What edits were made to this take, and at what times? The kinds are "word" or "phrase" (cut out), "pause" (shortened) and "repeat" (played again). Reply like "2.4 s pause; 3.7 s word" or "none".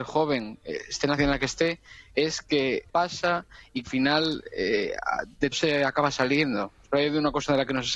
1.2 s word; 2.9 s word; 3.8 s word; 5.5 s word